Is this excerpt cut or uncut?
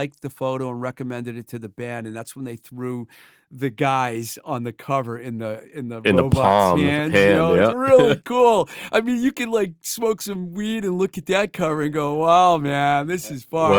uncut